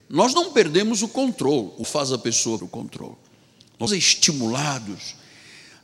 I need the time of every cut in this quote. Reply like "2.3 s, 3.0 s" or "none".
1.8 s, 2.6 s, 3.9 s